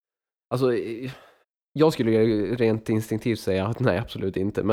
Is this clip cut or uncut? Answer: cut